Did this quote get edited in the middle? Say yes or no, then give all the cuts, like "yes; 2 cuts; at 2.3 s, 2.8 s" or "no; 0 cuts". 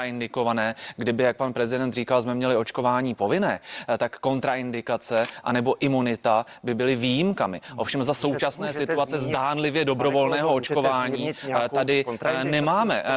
no; 0 cuts